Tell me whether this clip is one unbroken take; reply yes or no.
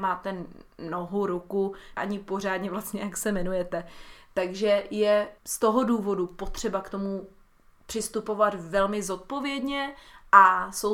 no